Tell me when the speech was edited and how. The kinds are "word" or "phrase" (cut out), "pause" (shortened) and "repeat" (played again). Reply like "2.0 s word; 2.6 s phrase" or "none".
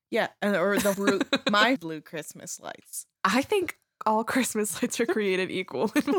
0.9 s word; 1.8 s phrase; 3.1 s pause